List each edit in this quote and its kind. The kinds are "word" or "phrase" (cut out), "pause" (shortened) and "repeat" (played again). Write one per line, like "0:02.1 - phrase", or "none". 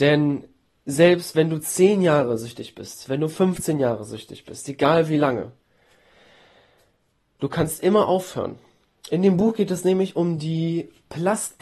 none